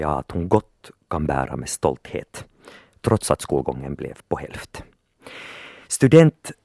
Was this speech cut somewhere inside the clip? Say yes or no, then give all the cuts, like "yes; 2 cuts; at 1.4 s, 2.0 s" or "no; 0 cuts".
no; 0 cuts